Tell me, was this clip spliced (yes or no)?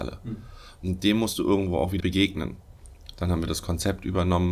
yes